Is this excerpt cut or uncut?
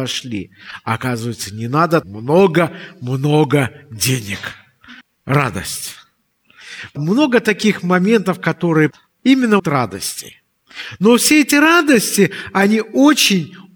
cut